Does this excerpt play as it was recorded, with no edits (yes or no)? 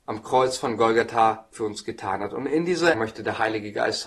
no